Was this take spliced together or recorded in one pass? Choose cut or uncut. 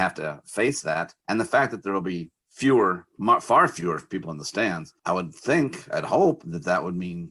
cut